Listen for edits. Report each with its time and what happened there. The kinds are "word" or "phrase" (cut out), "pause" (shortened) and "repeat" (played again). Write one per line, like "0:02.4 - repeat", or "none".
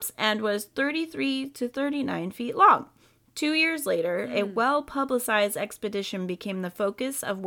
none